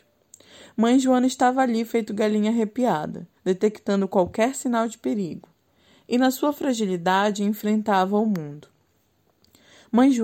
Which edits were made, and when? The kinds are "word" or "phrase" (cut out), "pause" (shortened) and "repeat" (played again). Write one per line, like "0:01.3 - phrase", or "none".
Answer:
0:03.4 - pause